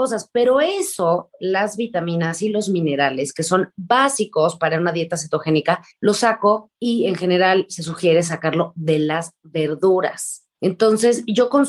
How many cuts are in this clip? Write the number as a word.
three